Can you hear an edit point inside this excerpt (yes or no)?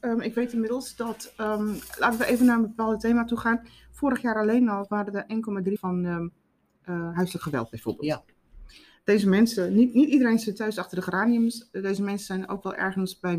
yes